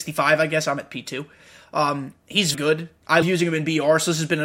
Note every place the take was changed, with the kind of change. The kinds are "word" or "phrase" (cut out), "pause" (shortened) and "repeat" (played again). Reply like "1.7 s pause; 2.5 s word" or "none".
2.5 s word; 3.2 s word